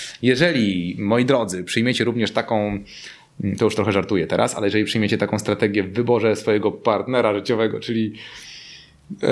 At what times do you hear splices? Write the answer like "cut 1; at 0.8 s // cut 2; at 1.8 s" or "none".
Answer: none